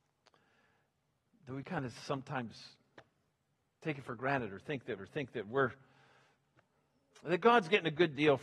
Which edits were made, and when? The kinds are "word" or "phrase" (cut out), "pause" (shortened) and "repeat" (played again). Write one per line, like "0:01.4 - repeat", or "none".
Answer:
0:03.3 - pause
0:05.0 - repeat